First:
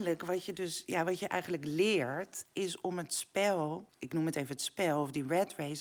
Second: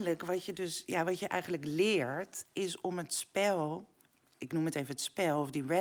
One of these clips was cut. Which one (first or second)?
first